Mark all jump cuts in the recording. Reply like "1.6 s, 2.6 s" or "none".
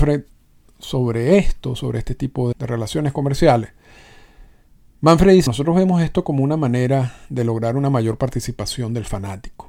2.5 s, 5.5 s